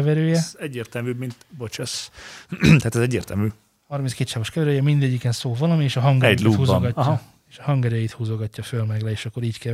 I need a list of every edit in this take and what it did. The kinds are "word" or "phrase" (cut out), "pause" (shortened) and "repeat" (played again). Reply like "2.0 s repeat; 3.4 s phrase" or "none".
none